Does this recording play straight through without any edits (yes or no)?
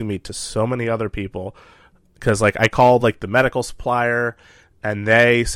yes